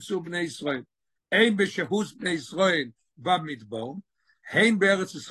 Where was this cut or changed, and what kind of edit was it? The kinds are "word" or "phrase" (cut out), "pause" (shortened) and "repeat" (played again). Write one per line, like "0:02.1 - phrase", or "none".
none